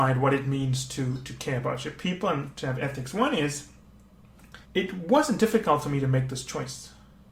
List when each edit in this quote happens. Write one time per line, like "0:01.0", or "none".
0:04.6